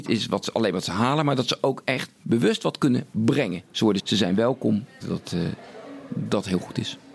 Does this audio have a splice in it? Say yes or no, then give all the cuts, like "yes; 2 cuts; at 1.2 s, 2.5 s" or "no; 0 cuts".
yes; 3 cuts; at 3.7 s, 4.0 s, 5.0 s